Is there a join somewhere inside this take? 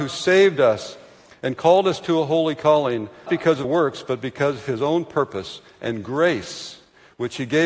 yes; 2 cuts; at 3.3 s, 3.6 s

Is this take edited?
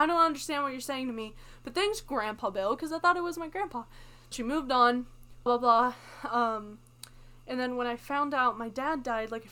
yes; 2 cuts; at 4.3 s, 5.5 s

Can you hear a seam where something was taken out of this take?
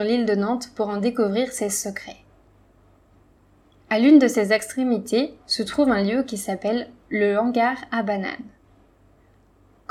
no; 0 cuts

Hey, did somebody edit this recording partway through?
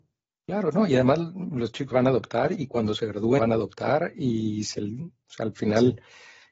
yes; 2 cuts; at 1.9 s, 3.4 s

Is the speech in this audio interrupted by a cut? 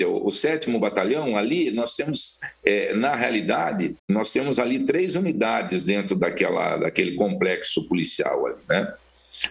yes; 1 cut; at 4.0 s

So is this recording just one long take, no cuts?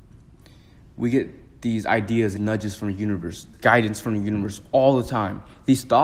no; 2 cuts; at 2.4 s, 3.5 s

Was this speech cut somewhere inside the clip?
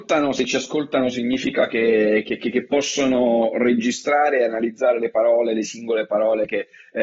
no; 0 cuts

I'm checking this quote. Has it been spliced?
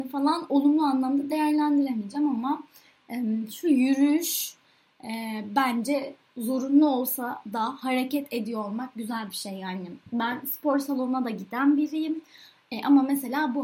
no; 0 cuts

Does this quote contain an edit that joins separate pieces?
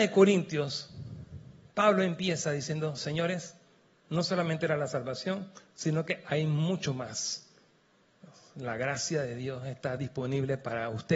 no; 0 cuts

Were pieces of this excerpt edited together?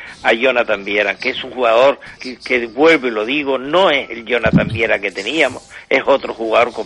yes; 1 cut; at 2.2 s

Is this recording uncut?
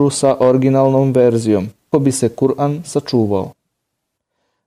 no; 1 cut; at 1.9 s

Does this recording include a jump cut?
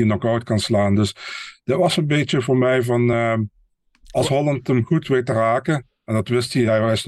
no; 0 cuts

